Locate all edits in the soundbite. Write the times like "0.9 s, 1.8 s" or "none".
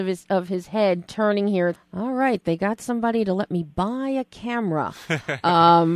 1.8 s